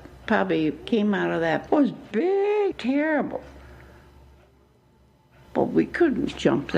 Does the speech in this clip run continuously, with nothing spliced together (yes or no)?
no